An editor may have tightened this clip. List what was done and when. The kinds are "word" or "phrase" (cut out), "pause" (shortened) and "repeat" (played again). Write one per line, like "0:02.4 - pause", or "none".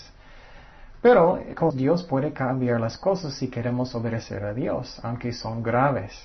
0:01.7 - word